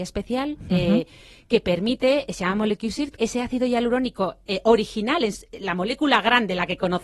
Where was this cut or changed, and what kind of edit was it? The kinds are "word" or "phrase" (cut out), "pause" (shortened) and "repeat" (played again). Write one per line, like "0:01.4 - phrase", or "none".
0:03.2 - phrase